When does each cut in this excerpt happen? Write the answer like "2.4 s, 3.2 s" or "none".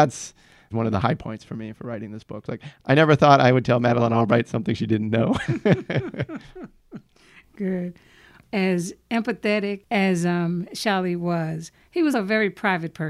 12.1 s